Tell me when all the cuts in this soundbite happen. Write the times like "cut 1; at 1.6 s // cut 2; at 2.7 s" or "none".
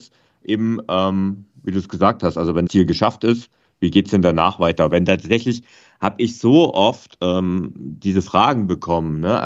cut 1; at 2.7 s